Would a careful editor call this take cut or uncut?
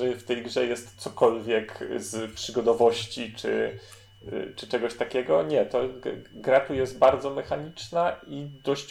uncut